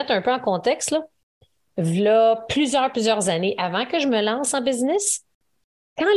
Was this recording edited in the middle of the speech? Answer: no; 0 cuts

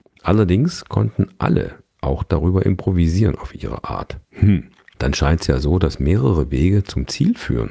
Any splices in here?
yes; 1 cut; at 4.2 s

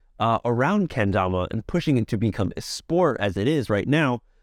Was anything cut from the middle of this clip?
no; 0 cuts

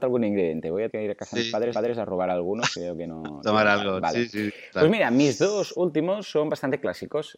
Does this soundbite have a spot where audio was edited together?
yes; 2 cuts; at 0.9 s, 1.7 s

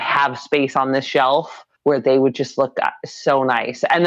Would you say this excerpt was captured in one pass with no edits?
no; 1 cut; at 1.7 s

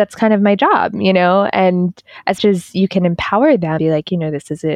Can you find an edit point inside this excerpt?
yes; 2 cuts; at 2.4 s, 3.8 s

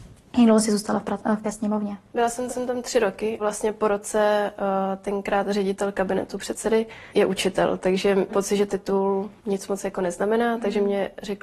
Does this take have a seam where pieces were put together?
yes; 7 cuts; at 1.4 s, 2.5 s, 3.4 s, 7.1 s, 8.3 s, 8.7 s, 9.4 s

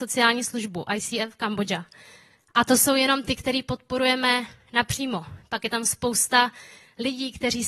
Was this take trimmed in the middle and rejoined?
no; 0 cuts

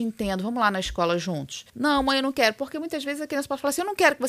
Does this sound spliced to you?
yes; 1 cut; at 1.7 s

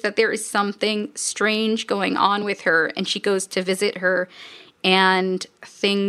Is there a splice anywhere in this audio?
no; 0 cuts

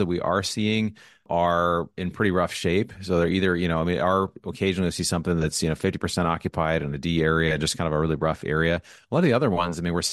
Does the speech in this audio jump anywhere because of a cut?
no; 0 cuts

